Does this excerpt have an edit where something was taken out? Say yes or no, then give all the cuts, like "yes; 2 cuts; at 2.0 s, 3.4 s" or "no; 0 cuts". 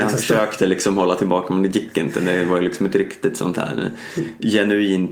no; 0 cuts